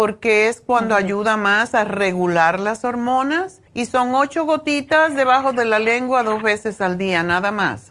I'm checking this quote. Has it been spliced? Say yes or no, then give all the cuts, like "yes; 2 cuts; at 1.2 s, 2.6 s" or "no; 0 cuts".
yes; 1 cut; at 3.7 s